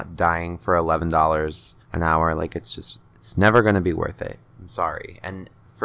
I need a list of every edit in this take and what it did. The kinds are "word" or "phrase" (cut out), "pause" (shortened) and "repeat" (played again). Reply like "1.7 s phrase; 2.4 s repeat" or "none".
1.8 s pause